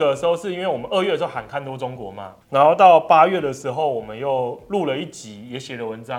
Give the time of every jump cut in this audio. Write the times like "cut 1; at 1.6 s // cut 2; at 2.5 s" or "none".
cut 1; at 2.4 s